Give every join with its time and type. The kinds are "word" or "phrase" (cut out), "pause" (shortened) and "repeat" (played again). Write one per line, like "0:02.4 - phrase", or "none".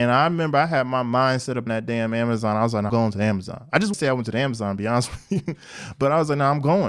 0:01.7 - word
0:02.9 - word
0:03.9 - word